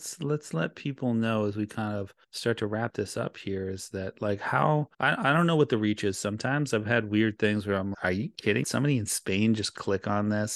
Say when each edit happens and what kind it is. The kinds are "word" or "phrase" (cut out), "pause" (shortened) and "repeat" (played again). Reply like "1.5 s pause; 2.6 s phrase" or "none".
2.2 s pause; 4.9 s pause; 7.9 s word; 8.6 s phrase